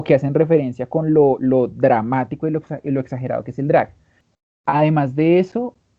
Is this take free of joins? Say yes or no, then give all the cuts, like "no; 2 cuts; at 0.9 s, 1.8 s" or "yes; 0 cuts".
yes; 0 cuts